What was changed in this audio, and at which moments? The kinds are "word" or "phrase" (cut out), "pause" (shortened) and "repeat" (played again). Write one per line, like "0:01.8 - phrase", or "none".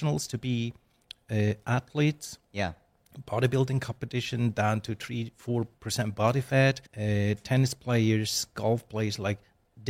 0:06.9 - pause